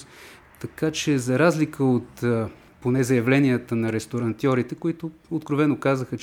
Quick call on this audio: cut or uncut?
cut